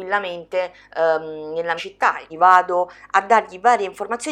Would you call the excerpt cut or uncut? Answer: cut